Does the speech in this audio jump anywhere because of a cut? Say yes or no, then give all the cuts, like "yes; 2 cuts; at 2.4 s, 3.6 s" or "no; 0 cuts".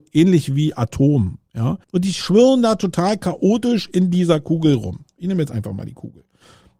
yes; 1 cut; at 1.8 s